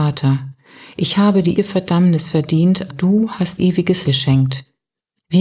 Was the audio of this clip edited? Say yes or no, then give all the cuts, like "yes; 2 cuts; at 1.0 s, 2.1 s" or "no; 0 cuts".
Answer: yes; 4 cuts; at 1.6 s, 2.9 s, 3.6 s, 4.0 s